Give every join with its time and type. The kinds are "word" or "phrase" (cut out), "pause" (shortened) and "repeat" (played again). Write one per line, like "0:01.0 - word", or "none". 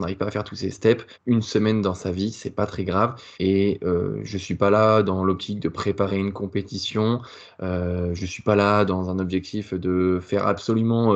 0:01.1 - pause
0:03.3 - pause